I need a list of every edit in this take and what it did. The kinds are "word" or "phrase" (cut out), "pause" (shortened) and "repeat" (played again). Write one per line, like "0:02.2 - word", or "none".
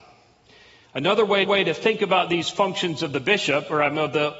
0:01.4 - repeat